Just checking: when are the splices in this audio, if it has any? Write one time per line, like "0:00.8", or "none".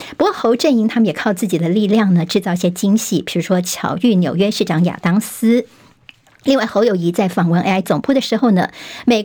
0:07.8